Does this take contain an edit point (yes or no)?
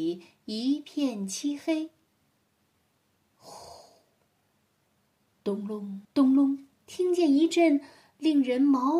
yes